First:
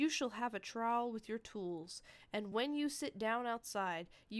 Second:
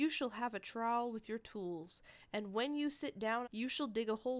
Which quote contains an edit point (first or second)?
second